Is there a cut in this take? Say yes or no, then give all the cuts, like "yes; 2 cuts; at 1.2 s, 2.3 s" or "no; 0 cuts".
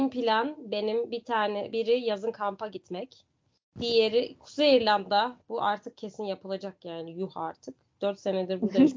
no; 0 cuts